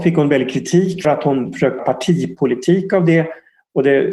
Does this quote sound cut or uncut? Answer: cut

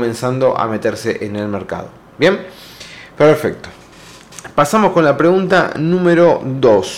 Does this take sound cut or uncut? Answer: uncut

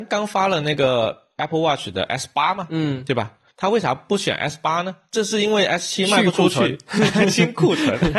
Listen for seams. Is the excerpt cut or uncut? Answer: uncut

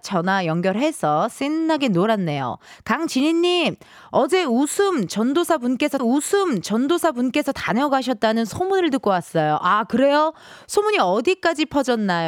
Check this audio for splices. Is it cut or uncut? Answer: cut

